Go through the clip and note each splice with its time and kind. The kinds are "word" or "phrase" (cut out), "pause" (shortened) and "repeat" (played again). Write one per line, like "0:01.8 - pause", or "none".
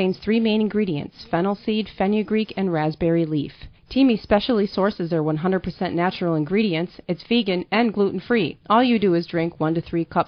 0:03.7 - pause
0:08.6 - pause